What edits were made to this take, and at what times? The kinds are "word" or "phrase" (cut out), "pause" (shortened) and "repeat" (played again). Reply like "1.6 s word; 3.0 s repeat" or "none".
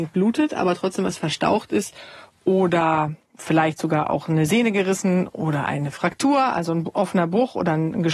none